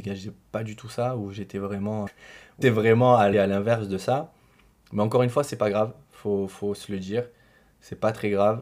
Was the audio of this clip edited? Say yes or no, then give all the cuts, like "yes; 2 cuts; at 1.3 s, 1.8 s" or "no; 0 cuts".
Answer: yes; 3 cuts; at 2.1 s, 2.6 s, 3.3 s